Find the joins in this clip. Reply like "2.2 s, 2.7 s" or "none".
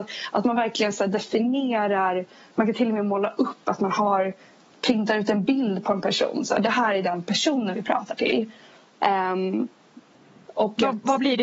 none

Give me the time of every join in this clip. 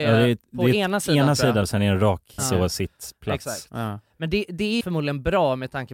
1.6 s, 2.4 s, 4.8 s

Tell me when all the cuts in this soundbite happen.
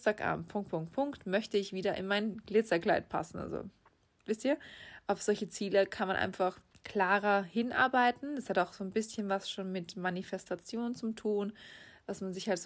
none

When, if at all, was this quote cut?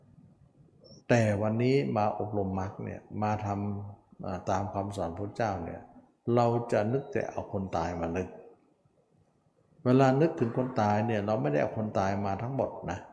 1.0 s

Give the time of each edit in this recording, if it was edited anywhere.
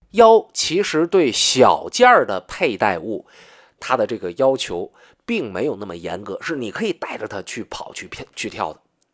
none

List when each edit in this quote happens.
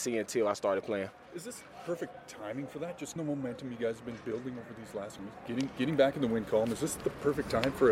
3.2 s, 5.2 s

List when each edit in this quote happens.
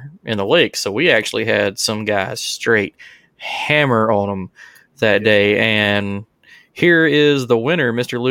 none

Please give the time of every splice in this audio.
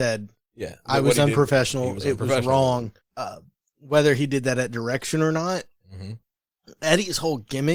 3.0 s

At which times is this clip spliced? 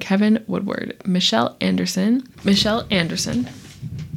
none

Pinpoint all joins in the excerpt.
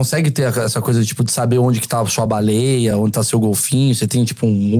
none

